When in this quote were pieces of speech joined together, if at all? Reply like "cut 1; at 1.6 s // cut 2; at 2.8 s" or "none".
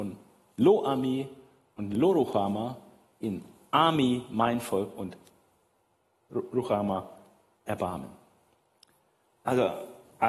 none